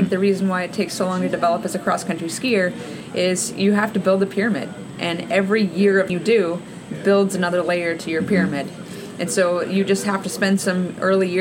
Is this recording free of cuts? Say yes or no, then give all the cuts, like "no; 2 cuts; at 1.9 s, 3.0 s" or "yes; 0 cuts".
no; 1 cut; at 6.1 s